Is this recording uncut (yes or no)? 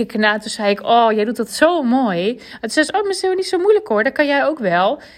no